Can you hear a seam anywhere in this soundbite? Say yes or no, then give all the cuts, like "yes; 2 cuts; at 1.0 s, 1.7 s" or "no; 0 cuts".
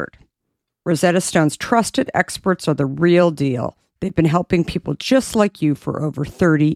no; 0 cuts